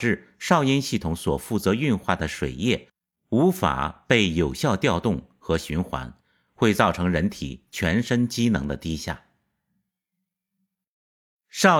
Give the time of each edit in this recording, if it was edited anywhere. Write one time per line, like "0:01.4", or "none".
none